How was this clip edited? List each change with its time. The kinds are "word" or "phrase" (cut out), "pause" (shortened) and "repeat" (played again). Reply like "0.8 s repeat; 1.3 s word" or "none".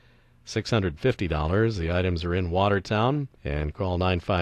3.3 s pause